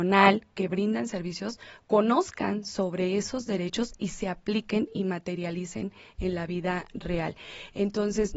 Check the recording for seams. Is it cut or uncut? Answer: uncut